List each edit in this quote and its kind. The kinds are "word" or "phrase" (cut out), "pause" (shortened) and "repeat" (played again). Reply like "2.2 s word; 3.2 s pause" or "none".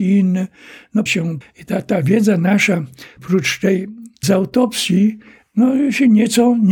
1.1 s word; 1.4 s word; 3.2 s word; 4.2 s word